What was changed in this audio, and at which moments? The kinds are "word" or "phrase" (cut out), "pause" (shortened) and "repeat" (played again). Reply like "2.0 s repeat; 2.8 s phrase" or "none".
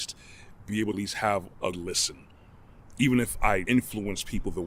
0.9 s phrase; 1.7 s word; 3.7 s phrase